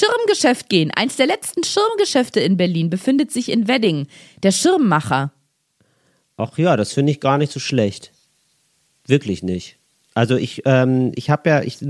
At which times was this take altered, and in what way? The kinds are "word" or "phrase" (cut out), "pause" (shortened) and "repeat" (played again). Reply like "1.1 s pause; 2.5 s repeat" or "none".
none